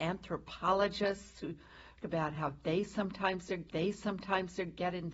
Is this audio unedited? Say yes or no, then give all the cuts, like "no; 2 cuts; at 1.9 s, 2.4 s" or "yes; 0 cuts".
no; 2 cuts; at 2.0 s, 3.7 s